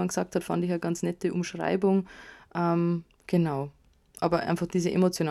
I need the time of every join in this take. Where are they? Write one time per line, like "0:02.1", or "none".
none